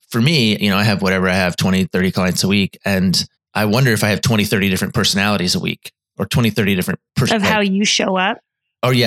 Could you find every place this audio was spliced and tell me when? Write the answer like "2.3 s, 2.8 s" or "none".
3.4 s, 7.1 s